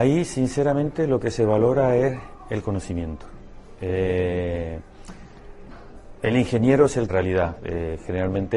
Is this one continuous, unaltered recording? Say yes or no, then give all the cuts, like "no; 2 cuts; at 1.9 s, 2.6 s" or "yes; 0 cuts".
no; 1 cut; at 7.1 s